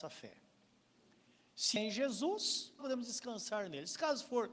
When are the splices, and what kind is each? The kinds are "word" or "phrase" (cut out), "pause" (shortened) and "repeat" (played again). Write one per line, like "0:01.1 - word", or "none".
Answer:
0:01.8 - word
0:02.8 - word

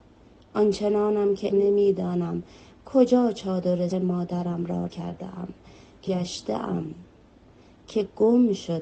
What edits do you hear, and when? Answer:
0:01.5 - word
0:03.9 - word
0:04.9 - word
0:06.1 - word

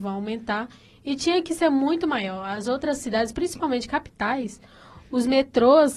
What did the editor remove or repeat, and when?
none

